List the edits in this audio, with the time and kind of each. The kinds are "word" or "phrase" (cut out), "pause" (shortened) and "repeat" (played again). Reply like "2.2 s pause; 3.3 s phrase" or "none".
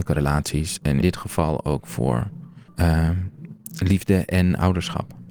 1.0 s word; 2.7 s pause